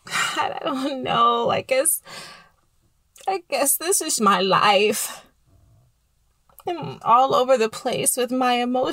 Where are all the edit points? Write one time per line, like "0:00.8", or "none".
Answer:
0:04.2
0:07.0